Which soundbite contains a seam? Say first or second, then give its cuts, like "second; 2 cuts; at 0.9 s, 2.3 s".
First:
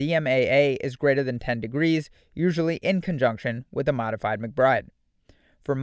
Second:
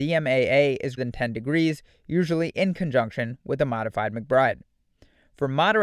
second; 1 cut; at 1.0 s